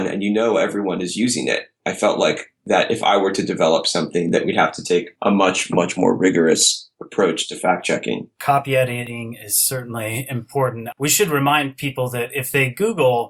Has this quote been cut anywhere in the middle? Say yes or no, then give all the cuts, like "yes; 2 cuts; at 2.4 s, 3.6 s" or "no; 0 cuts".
no; 0 cuts